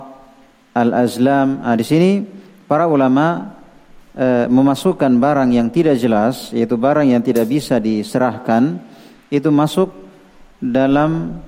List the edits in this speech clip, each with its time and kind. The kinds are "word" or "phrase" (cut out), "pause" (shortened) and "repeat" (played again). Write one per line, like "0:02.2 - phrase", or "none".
none